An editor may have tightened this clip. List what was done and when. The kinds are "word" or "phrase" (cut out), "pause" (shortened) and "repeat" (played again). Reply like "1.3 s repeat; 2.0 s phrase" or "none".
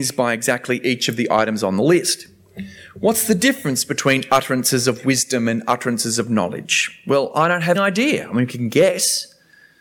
7.7 s word